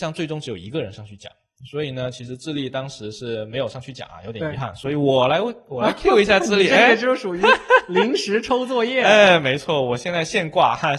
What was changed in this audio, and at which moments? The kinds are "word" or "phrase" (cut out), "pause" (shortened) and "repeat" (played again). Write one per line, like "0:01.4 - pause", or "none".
none